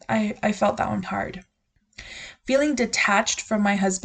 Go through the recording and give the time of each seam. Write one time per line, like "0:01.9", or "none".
0:01.0

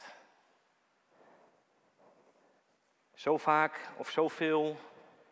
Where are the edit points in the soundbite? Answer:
none

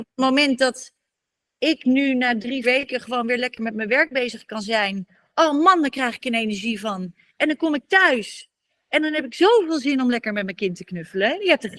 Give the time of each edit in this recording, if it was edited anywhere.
0:02.6

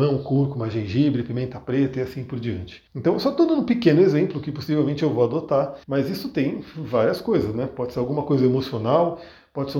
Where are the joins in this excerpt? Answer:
0:02.9
0:05.8

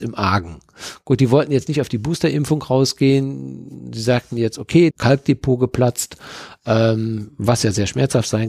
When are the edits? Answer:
0:04.9

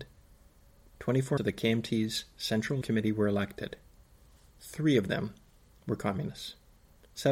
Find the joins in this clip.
0:01.4
0:02.8

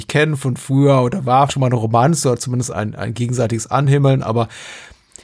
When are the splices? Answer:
0:01.5
0:02.7

